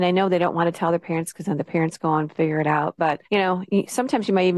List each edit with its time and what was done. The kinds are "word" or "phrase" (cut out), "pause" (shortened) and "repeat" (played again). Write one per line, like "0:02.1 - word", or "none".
0:03.2 - pause